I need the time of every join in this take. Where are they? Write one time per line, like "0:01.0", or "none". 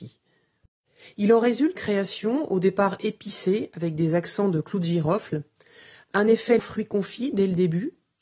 0:01.7
0:06.6